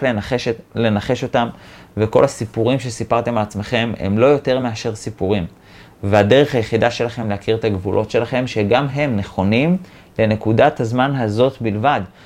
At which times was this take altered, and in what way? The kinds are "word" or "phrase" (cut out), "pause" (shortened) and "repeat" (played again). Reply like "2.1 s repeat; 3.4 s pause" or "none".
none

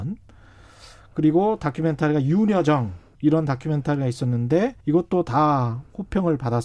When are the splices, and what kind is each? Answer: 3.1 s pause; 4.8 s pause

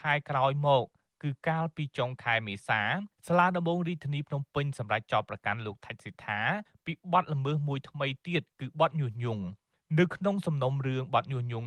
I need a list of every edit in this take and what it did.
none

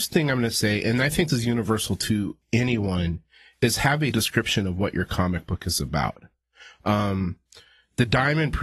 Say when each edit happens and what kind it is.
1.3 s word; 4.1 s word

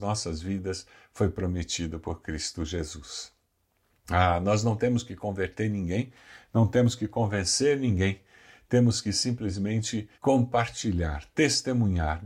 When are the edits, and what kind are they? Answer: 10.1 s pause

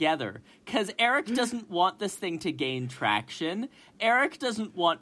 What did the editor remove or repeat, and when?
none

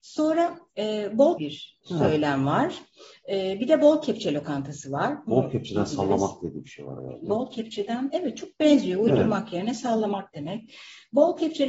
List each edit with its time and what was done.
1.4 s phrase; 1.8 s pause

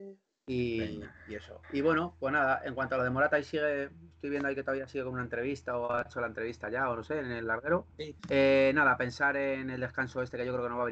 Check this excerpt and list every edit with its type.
8.2 s pause

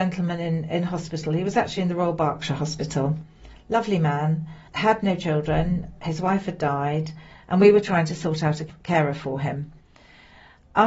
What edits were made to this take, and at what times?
none

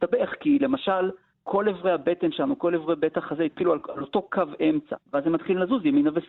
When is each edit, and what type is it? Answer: 1.3 s pause; 5.0 s pause

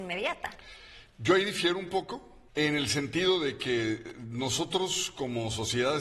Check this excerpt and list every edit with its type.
2.5 s pause

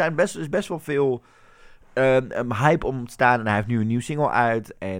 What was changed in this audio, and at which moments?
none

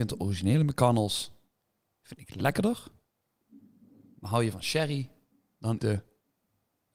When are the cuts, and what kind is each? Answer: 5.8 s word

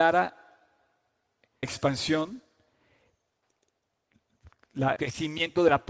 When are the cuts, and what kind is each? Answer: 1.6 s word; 5.0 s word

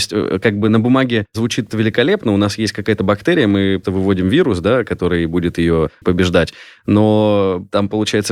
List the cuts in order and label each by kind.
1.7 s word; 3.8 s word; 6.0 s phrase

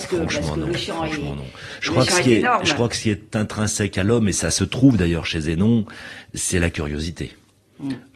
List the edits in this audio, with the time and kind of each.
none

